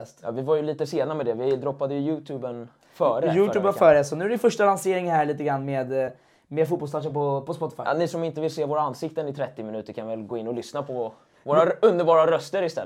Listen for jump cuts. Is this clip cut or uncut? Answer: uncut